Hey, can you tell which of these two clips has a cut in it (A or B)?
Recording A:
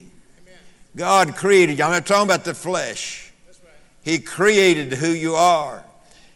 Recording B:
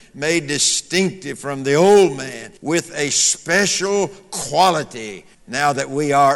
B